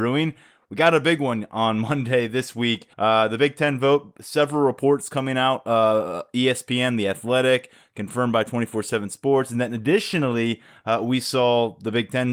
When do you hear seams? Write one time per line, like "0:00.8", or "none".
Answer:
0:02.9